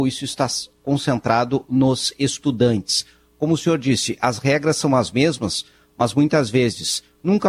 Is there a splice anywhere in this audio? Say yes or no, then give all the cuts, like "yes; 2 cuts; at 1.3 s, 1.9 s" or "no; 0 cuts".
no; 0 cuts